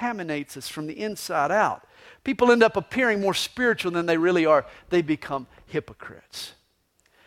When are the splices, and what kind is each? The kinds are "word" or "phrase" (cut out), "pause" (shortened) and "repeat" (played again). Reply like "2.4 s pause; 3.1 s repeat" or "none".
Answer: none